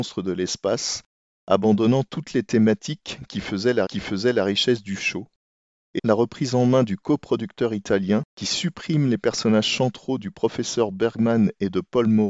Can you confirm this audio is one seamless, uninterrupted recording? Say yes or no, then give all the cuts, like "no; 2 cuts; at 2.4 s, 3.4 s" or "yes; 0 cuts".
no; 3 cuts; at 3.9 s, 6.0 s, 8.3 s